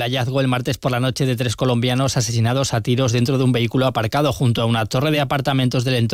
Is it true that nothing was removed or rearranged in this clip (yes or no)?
yes